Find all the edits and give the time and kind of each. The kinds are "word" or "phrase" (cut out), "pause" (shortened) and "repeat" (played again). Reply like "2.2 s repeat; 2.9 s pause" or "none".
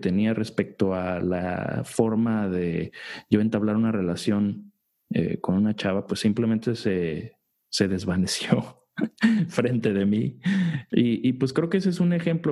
none